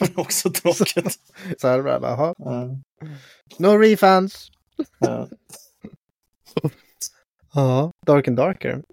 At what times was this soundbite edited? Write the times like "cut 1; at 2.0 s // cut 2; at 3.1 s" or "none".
cut 1; at 1.6 s